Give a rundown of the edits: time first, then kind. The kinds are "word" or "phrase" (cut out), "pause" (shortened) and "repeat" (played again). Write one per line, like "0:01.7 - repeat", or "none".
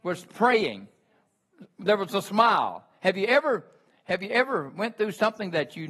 none